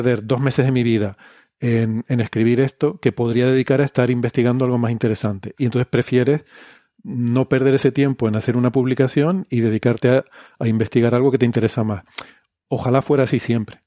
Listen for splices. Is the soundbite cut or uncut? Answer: uncut